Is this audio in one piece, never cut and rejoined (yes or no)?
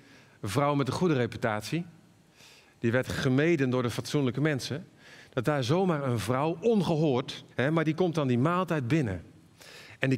no